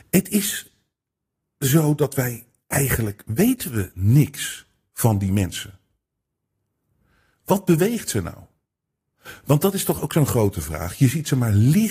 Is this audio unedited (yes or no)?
yes